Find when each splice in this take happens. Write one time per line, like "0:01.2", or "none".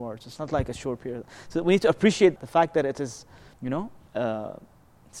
0:02.4
0:03.5
0:04.1